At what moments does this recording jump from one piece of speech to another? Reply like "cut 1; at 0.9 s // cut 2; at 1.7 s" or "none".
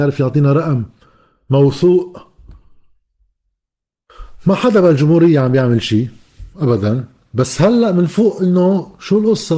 none